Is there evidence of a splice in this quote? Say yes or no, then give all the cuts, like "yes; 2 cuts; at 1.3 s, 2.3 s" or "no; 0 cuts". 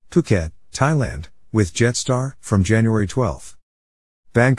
yes; 1 cut; at 2.4 s